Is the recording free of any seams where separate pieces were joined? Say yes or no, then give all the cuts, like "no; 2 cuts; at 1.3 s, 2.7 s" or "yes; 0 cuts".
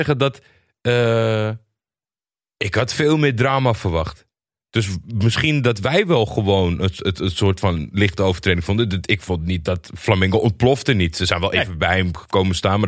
yes; 0 cuts